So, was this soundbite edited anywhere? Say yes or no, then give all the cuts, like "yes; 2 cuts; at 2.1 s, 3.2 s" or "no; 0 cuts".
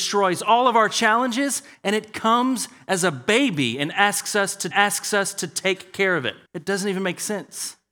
yes; 2 cuts; at 4.7 s, 6.4 s